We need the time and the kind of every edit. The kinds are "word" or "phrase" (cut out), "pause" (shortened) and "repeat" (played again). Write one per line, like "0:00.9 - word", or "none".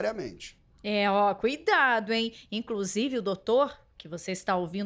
none